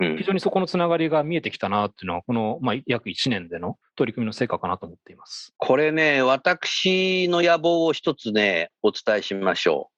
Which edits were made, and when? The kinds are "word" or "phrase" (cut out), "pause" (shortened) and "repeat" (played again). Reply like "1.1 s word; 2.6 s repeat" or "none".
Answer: 3.8 s pause; 5.5 s pause; 8.8 s pause